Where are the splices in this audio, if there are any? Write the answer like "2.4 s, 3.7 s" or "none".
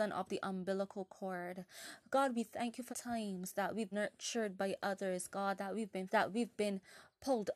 2.9 s, 3.9 s, 6.1 s